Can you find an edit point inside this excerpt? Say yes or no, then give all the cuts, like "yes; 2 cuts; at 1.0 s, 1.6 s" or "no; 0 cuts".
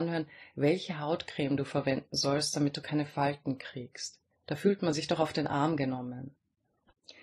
yes; 1 cut; at 4.3 s